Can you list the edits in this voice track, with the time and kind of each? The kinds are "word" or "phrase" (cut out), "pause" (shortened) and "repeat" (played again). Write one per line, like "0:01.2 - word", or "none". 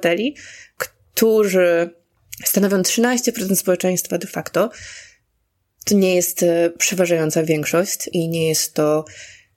0:08.1 - word